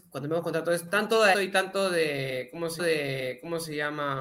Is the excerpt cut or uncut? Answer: cut